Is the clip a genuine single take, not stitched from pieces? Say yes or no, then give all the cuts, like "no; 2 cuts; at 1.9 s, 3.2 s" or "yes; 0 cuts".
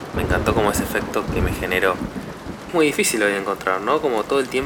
no; 2 cuts; at 1.3 s, 2.7 s